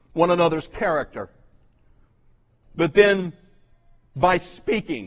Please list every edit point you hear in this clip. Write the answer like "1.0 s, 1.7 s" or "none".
none